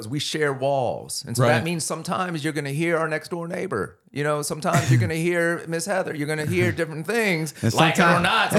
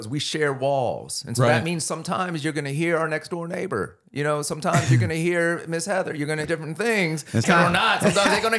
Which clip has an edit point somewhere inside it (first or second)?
second